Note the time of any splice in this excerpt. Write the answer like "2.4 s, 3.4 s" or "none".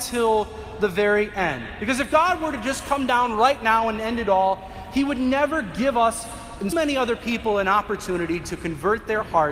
6.7 s

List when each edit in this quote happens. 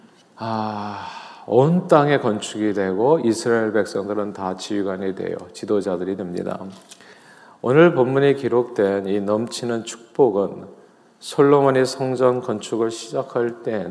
none

